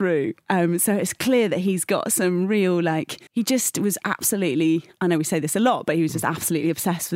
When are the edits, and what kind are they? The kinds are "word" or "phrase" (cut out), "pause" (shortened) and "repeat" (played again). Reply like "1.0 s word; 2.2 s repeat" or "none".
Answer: 3.3 s pause